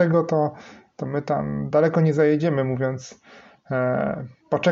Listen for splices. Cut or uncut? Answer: uncut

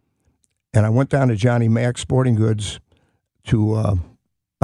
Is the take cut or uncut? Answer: uncut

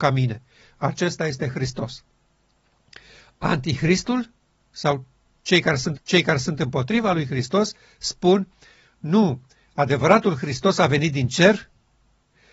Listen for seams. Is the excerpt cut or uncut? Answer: cut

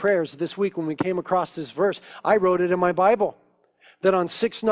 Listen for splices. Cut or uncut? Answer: uncut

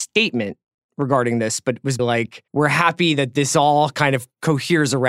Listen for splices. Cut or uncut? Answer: cut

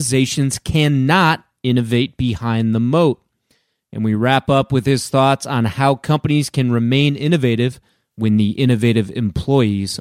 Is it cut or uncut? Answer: uncut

